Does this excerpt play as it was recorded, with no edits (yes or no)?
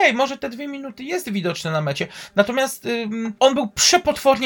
yes